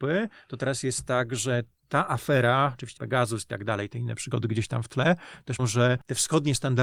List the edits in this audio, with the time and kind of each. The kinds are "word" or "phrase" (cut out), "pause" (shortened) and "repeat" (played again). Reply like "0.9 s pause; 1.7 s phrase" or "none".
3.0 s word; 5.6 s word